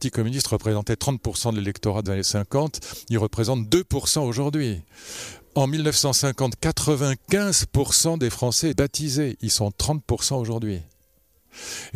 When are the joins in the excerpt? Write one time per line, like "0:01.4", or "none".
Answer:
0:02.1
0:08.7